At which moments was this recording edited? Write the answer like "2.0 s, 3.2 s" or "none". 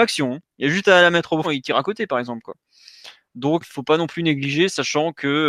1.4 s, 3.6 s